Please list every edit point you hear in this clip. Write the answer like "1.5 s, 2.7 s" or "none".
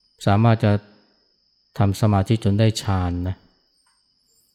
none